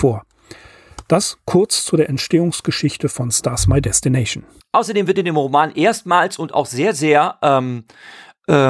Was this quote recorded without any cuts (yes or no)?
no